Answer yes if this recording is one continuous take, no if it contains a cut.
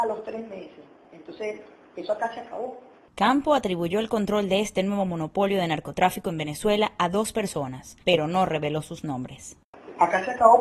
yes